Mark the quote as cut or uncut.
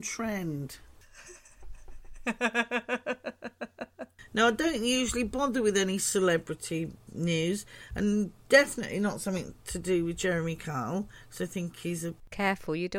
uncut